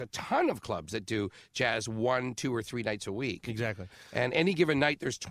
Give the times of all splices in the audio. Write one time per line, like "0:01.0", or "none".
none